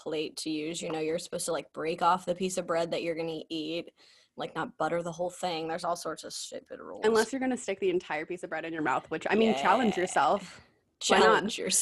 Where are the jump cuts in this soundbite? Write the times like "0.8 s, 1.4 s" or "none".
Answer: none